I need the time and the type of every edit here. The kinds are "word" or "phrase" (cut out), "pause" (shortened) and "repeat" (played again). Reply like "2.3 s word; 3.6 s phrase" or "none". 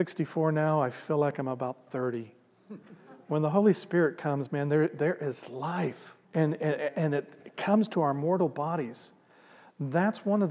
6.2 s pause